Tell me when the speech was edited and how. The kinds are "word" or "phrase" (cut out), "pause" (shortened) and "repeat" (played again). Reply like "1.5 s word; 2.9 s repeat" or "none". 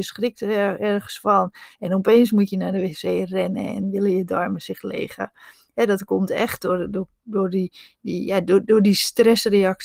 none